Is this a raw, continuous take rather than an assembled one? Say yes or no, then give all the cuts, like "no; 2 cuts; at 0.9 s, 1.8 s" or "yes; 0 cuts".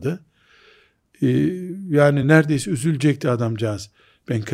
yes; 0 cuts